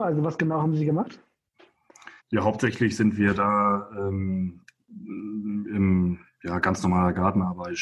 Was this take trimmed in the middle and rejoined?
yes; 1 cut; at 2.2 s

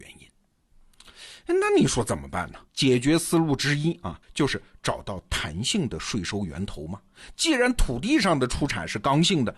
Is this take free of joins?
no; 2 cuts; at 2.7 s, 4.2 s

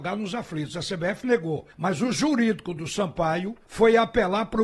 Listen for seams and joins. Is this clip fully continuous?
no; 2 cuts; at 1.7 s, 3.6 s

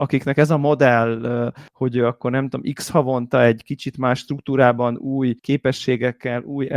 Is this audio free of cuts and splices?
no; 2 cuts; at 1.7 s, 5.4 s

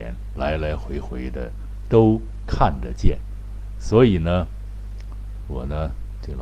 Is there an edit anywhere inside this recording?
yes; 1 cut; at 5.4 s

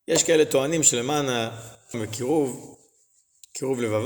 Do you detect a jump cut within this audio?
yes; 1 cut; at 1.9 s

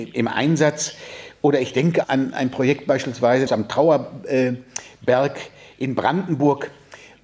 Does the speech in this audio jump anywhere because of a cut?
yes; 2 cuts; at 2.0 s, 3.5 s

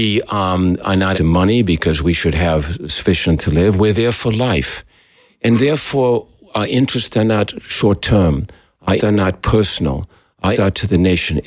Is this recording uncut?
no; 4 cuts; at 1.1 s, 3.4 s, 9.0 s, 10.5 s

